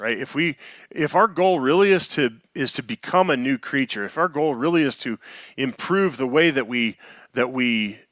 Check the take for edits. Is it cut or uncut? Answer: uncut